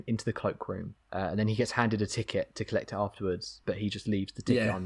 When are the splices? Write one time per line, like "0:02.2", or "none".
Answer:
0:01.0